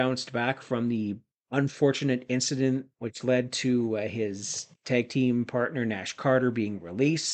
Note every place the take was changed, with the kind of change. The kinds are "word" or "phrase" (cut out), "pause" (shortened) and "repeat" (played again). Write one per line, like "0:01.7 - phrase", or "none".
0:01.3 - pause
0:02.9 - pause